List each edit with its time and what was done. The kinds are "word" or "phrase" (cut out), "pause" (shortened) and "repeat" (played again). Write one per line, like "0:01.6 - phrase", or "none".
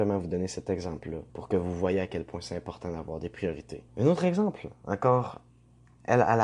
0:01.3 - pause
0:03.9 - pause